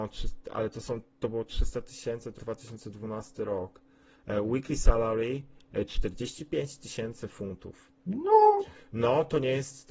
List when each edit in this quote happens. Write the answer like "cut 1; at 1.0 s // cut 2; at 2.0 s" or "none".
cut 1; at 2.4 s // cut 2; at 8.0 s